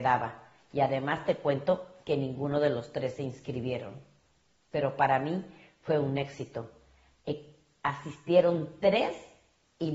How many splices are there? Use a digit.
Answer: 0